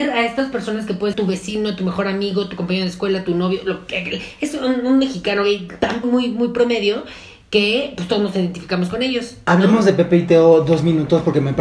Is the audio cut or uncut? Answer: cut